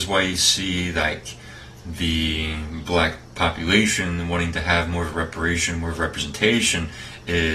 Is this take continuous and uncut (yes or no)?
no